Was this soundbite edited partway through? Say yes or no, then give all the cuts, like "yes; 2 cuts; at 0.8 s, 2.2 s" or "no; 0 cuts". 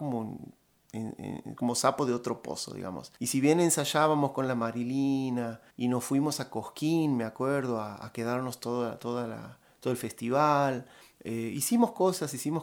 yes; 3 cuts; at 3.2 s, 5.7 s, 11.0 s